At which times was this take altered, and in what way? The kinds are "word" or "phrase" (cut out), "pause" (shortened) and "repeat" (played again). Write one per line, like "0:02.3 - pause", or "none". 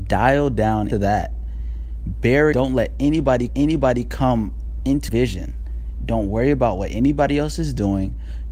0:00.9 - word
0:02.5 - phrase
0:03.5 - repeat
0:05.1 - word